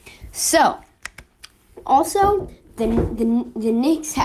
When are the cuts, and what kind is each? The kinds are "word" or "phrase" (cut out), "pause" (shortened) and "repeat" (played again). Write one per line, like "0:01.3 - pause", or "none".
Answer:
none